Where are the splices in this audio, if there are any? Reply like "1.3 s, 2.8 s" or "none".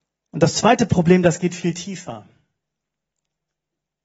none